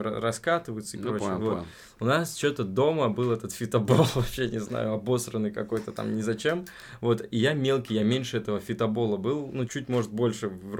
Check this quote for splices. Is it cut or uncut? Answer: cut